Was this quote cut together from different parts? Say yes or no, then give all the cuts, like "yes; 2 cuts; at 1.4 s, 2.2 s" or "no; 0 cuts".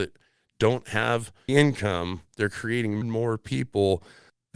yes; 2 cuts; at 1.5 s, 3.0 s